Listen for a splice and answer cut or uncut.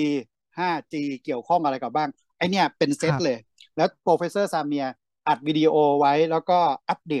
uncut